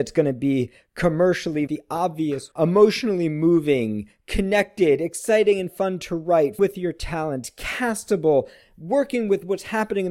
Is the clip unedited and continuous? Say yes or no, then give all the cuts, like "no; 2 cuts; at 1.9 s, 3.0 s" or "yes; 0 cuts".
no; 3 cuts; at 1.7 s, 2.5 s, 6.6 s